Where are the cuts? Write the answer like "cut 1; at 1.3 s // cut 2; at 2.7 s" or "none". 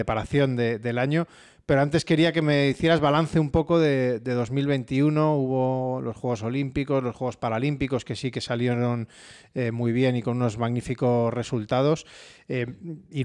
none